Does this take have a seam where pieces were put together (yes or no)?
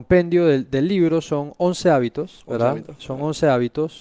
no